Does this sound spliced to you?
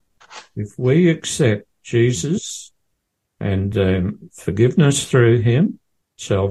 no; 0 cuts

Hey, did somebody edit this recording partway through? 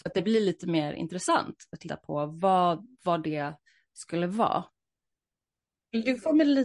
no; 0 cuts

